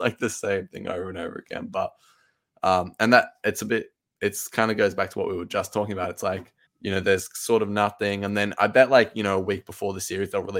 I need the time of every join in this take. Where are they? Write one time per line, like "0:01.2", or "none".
0:06.7

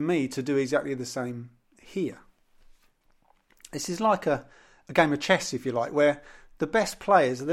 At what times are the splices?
none

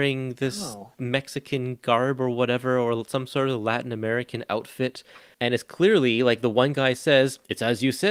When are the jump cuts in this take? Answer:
none

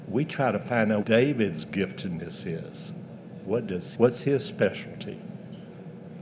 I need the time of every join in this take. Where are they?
0:01.0
0:04.0

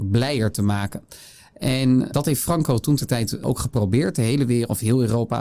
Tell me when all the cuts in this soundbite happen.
none

